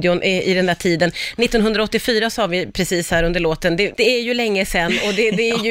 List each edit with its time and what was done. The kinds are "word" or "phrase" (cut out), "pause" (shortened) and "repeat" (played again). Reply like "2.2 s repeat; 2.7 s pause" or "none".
3.9 s word